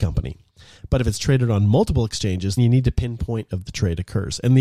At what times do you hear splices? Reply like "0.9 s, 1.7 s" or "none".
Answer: 2.6 s, 3.5 s